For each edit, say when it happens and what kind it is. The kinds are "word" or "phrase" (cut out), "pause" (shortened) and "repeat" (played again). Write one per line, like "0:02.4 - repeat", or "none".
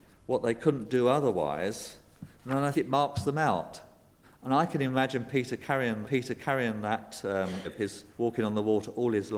0:02.3 - pause
0:02.7 - word
0:04.2 - pause
0:06.0 - repeat
0:07.6 - word
0:08.1 - pause